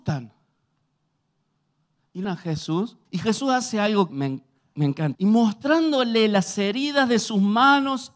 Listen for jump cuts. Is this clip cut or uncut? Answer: cut